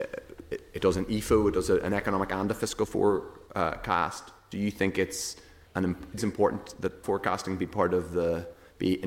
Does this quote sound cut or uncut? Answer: cut